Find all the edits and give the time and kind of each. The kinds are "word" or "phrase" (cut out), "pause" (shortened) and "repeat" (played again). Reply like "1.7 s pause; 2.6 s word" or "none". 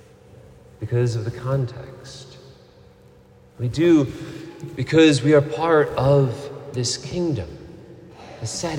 none